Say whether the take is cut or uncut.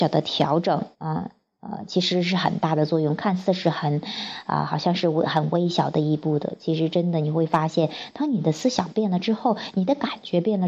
cut